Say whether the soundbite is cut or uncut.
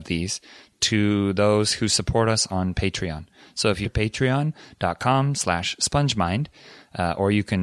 cut